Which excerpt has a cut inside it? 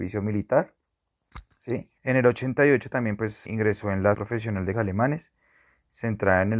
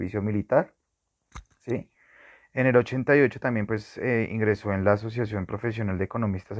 first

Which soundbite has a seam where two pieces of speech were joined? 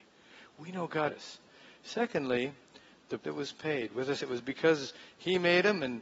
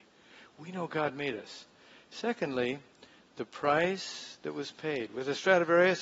first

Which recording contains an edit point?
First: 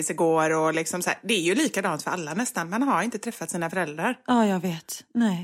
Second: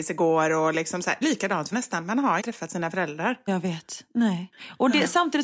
second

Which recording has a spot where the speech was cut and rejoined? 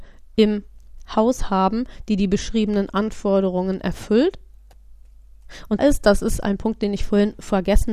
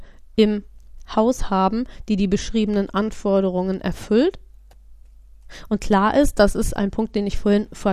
first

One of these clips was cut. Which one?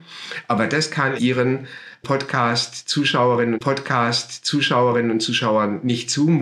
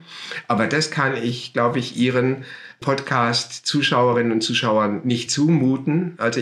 first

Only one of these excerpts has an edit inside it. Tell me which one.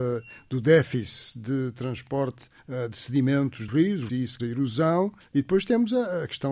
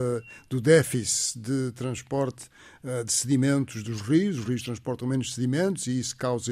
first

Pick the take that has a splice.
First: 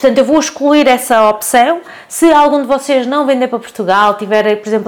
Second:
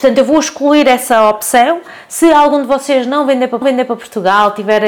second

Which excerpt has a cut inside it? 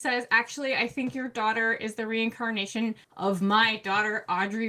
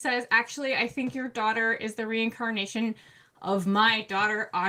first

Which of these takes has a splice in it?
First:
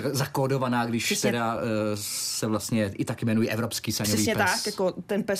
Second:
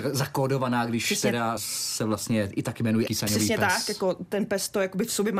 second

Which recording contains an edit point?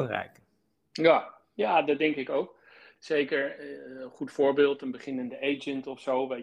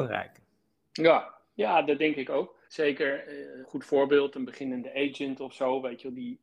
second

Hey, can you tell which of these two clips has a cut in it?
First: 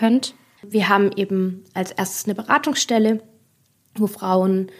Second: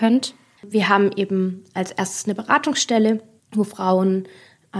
second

